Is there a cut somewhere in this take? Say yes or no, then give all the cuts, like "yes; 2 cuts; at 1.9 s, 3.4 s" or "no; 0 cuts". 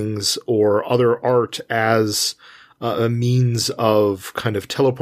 no; 0 cuts